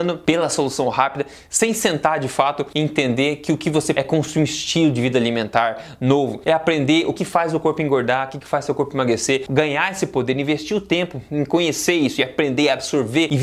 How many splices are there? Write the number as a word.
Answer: two